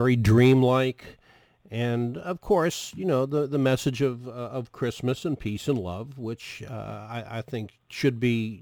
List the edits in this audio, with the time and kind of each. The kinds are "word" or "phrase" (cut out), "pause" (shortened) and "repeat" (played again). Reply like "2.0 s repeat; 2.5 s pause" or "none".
none